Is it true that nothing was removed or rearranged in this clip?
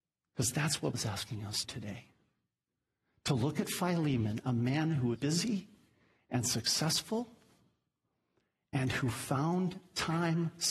no; 3 cuts; at 0.9 s, 1.6 s, 5.1 s

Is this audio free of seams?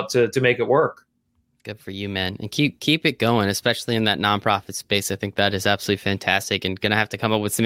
yes; 0 cuts

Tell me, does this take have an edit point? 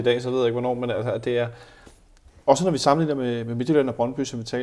no; 0 cuts

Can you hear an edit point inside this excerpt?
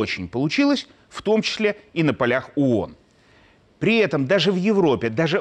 no; 0 cuts

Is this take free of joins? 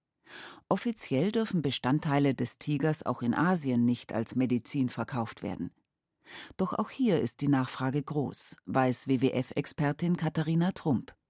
yes; 0 cuts

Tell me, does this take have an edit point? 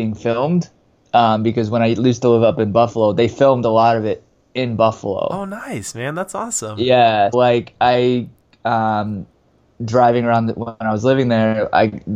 yes; 1 cut; at 7.3 s

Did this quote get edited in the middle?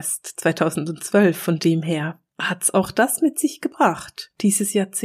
no; 0 cuts

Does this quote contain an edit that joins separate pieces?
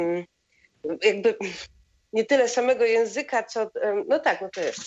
no; 0 cuts

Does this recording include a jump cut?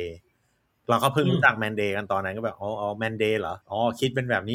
yes; 1 cut; at 3.6 s

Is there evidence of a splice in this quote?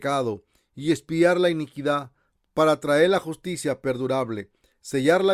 no; 0 cuts

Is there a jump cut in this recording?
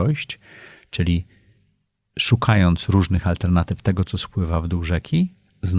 no; 0 cuts

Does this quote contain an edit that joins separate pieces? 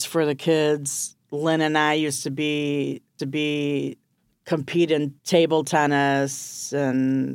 yes; 3 cuts; at 1.2 s, 3.2 s, 5.2 s

